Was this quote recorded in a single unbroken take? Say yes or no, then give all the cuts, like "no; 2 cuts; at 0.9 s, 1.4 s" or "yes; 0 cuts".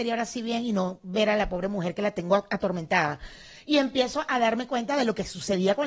yes; 0 cuts